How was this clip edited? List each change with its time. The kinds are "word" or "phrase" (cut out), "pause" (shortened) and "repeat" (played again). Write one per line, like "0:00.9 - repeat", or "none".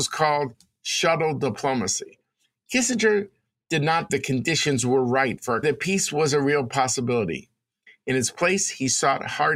0:04.1 - word
0:05.6 - phrase